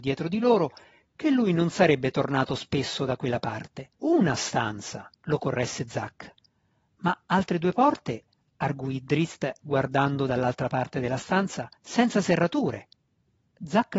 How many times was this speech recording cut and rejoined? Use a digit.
4